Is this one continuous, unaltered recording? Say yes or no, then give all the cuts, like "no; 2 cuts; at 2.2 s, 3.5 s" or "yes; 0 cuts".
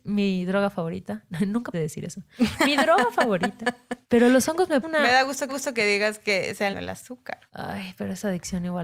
no; 6 cuts; at 1.7 s, 4.0 s, 4.8 s, 5.5 s, 6.7 s, 7.5 s